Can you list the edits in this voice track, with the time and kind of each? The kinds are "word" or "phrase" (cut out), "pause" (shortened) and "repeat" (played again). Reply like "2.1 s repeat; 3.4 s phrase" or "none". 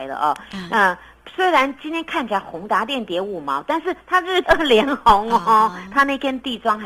4.4 s word